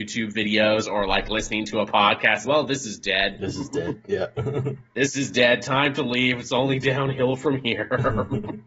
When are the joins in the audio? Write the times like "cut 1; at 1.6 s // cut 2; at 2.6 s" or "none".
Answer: cut 1; at 2.4 s